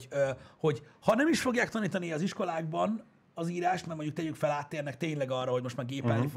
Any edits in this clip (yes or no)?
no